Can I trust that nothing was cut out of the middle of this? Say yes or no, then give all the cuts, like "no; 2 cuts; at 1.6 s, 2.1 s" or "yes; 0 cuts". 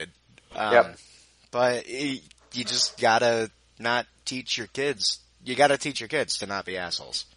yes; 0 cuts